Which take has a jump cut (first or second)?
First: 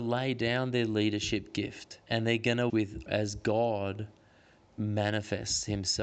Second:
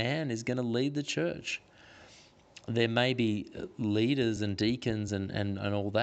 first